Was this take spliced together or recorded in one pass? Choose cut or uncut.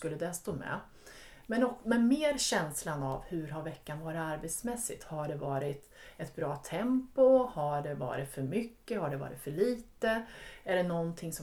uncut